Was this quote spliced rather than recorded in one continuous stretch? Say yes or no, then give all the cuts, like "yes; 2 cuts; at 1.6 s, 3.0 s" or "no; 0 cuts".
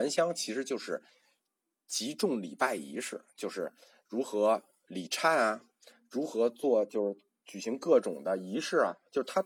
no; 0 cuts